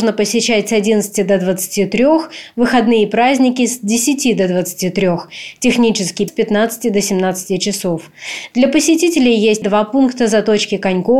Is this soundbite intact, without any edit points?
no; 2 cuts; at 6.3 s, 9.6 s

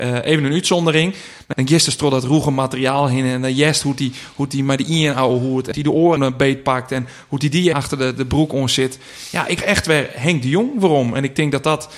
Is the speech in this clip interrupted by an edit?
yes; 5 cuts; at 1.5 s, 5.7 s, 6.2 s, 7.7 s, 9.6 s

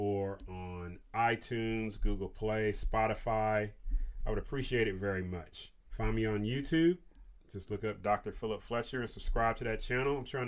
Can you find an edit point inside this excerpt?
yes; 1 cut; at 5.8 s

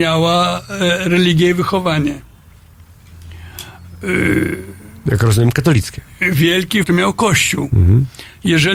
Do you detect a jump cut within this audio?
yes; 1 cut; at 6.8 s

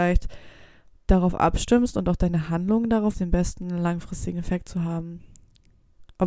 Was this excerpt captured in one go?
no; 1 cut; at 3.1 s

